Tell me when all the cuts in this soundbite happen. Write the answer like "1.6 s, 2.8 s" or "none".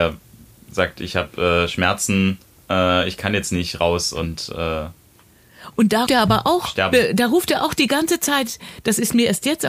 2.4 s, 6.1 s